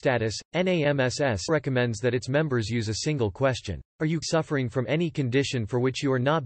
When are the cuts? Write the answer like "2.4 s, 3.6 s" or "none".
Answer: 1.5 s, 3.9 s, 4.2 s